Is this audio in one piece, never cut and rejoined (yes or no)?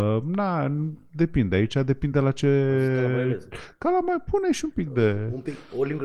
yes